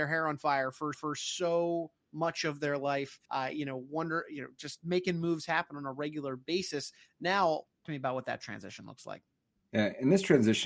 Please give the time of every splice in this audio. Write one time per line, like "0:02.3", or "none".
0:00.9
0:03.2
0:07.8